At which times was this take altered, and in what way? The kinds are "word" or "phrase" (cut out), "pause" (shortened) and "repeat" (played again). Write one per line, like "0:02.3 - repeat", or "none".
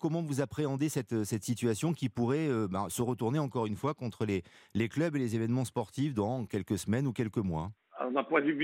none

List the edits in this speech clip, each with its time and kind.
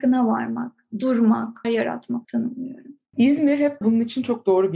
0:01.6 - word
0:02.2 - word
0:03.1 - pause
0:03.8 - word

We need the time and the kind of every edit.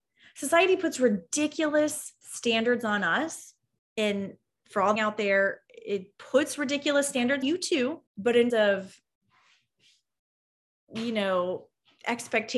0:02.2 - pause
0:03.8 - pause
0:05.0 - phrase
0:07.4 - word
0:08.1 - pause
0:08.5 - word

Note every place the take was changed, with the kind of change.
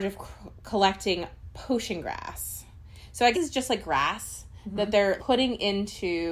0:03.3 - word
0:05.2 - word

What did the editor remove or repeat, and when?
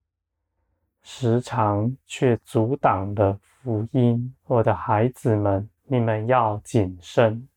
0:02.0 - pause
0:04.4 - pause
0:05.8 - pause

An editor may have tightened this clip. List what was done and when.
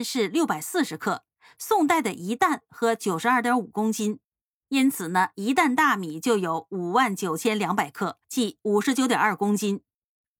0:08.2 - pause

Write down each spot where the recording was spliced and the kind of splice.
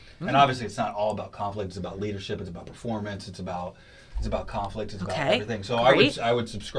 none

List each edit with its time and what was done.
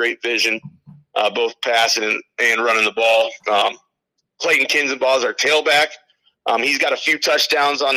none

